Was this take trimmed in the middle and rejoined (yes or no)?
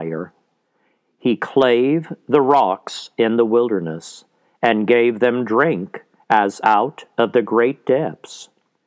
no